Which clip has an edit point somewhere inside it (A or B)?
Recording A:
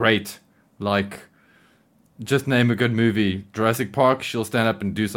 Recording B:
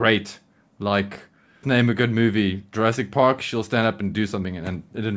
B